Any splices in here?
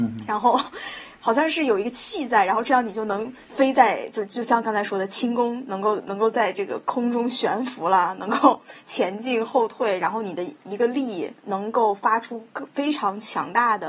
yes; 2 cuts; at 3.4 s, 11.4 s

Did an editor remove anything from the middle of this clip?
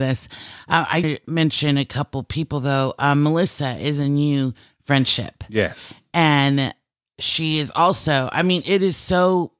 yes; 1 cut; at 1.0 s

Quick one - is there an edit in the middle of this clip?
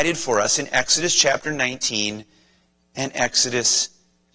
no; 0 cuts

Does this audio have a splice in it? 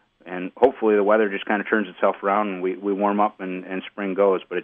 no; 0 cuts

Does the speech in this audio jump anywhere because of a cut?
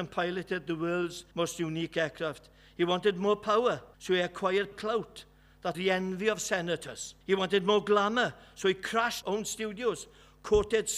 yes; 6 cuts; at 1.3 s, 3.9 s, 4.7 s, 5.7 s, 7.2 s, 9.2 s

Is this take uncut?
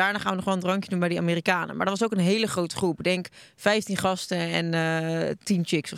yes; 0 cuts

